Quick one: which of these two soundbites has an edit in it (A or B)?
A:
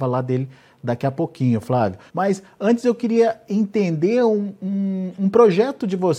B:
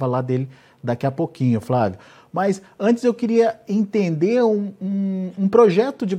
A